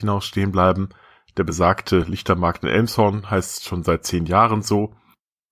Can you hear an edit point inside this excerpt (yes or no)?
no